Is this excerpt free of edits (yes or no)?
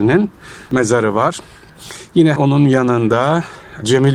no